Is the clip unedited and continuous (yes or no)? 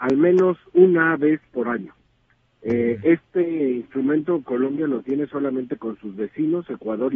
yes